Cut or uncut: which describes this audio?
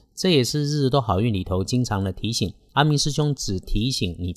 uncut